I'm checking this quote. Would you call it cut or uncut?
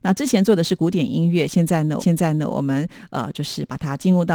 cut